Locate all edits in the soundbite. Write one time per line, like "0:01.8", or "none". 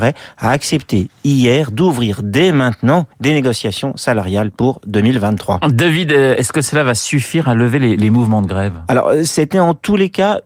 0:03.1

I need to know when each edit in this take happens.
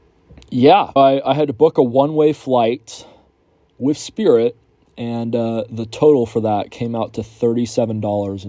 0:01.0

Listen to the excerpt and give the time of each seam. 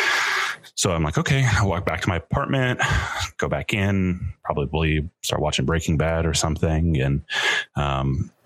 none

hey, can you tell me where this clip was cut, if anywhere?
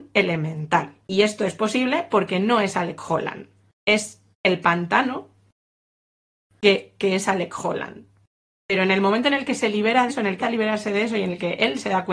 0:01.0
0:04.3
0:07.0
0:10.1
0:10.4

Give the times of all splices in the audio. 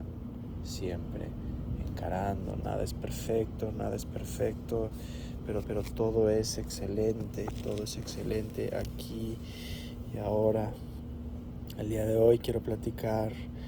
0:05.6

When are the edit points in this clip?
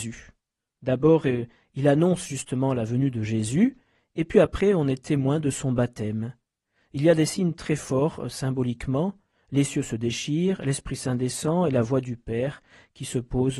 none

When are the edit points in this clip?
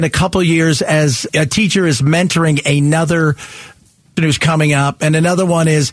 0:01.3
0:04.2

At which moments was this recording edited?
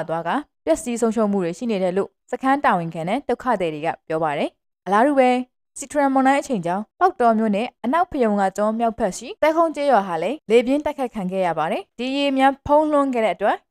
none

